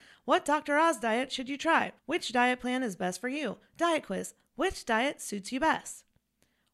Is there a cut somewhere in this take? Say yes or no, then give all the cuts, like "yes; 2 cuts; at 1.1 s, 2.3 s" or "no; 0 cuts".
yes; 1 cut; at 2.0 s